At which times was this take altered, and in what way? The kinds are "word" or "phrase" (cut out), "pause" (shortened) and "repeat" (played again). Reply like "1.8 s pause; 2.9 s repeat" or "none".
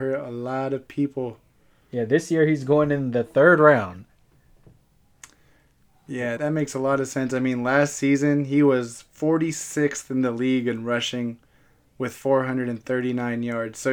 6.4 s word